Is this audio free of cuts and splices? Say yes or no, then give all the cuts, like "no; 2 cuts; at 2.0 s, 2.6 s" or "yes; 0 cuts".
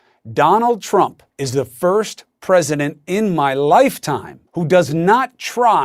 no; 2 cuts; at 1.3 s, 4.5 s